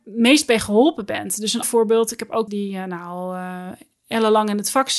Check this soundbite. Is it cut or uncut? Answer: cut